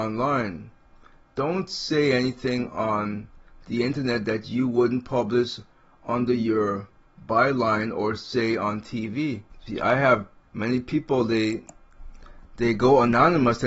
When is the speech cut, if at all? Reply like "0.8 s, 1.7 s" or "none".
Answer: 10.4 s